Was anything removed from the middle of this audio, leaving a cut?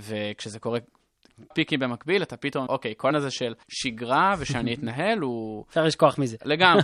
yes; 4 cuts; at 1.5 s, 2.7 s, 3.1 s, 3.6 s

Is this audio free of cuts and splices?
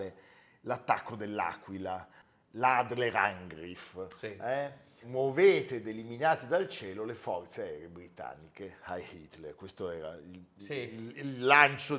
no; 1 cut; at 5.0 s

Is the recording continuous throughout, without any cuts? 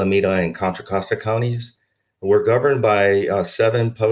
yes; 0 cuts

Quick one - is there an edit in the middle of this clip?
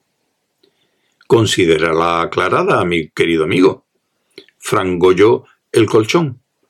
no; 0 cuts

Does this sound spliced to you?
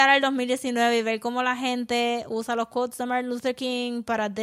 no; 0 cuts

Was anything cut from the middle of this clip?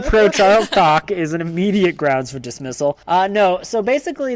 yes; 1 cut; at 3.0 s

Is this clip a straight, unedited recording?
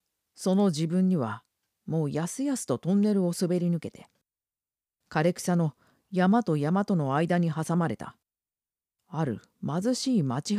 yes; 0 cuts

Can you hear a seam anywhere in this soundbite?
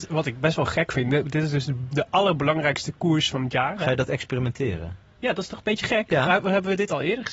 no; 0 cuts

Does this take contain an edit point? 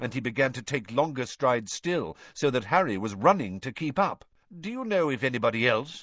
yes; 1 cut; at 4.4 s

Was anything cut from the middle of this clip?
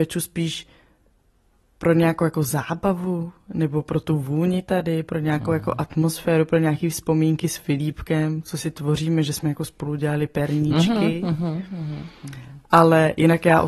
no; 0 cuts

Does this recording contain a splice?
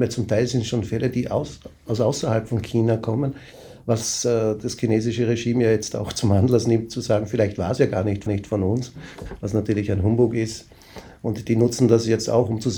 yes; 1 cut; at 8.3 s

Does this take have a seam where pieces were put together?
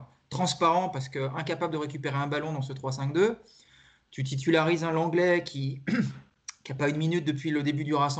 no; 0 cuts

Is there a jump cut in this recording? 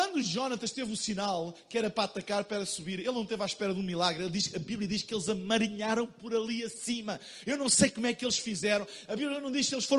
no; 0 cuts

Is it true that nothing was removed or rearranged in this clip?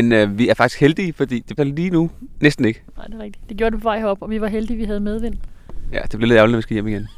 no; 1 cut; at 1.6 s

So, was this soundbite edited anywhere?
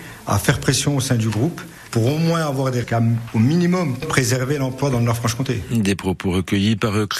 yes; 1 cut; at 2.8 s

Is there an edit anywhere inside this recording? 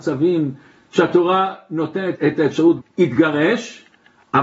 yes; 2 cuts; at 2.1 s, 2.8 s

